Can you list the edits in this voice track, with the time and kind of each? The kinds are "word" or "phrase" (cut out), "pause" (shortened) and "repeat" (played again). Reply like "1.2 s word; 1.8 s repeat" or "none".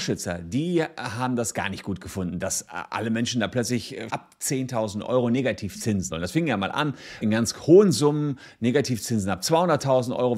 4.1 s word; 6.1 s word; 7.2 s word